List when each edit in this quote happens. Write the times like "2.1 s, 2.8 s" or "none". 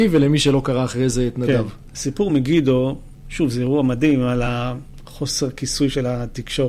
none